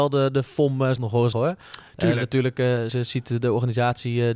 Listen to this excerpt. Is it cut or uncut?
cut